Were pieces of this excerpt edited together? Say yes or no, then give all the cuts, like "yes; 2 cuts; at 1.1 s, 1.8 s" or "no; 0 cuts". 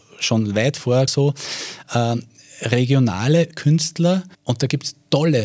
yes; 3 cuts; at 1.1 s, 3.5 s, 4.3 s